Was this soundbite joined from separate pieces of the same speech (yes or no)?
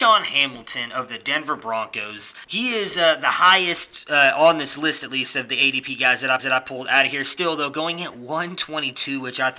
yes